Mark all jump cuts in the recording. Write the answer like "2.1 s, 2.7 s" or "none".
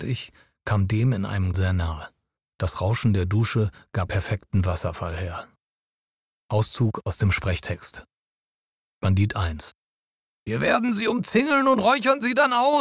1.5 s, 4.1 s